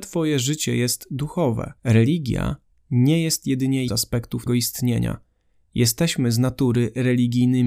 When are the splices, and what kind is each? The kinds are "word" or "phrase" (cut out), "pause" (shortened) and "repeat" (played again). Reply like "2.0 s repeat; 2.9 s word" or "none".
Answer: 1.8 s pause; 3.9 s word; 4.5 s word

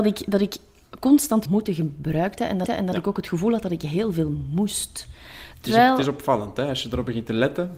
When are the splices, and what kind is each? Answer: 1.5 s phrase; 2.7 s repeat

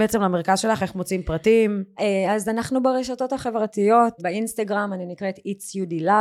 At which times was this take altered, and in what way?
4.2 s word

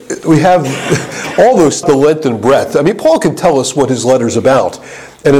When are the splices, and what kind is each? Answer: 1.8 s phrase

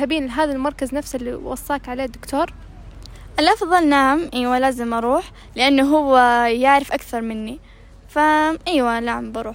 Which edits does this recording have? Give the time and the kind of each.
none

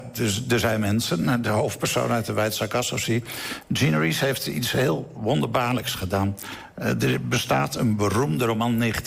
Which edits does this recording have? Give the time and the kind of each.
none

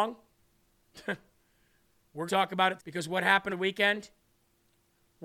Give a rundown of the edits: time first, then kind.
2.3 s word; 2.8 s word; 3.5 s word

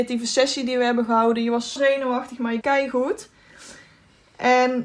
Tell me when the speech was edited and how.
1.8 s word; 2.6 s phrase

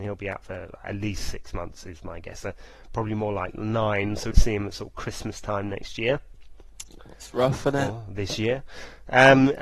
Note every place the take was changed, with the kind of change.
4.3 s word

